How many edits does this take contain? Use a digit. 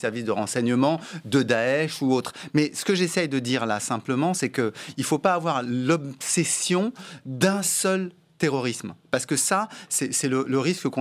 0